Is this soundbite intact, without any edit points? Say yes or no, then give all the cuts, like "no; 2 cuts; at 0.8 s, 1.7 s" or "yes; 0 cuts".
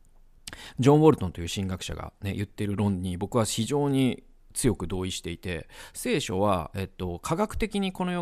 yes; 0 cuts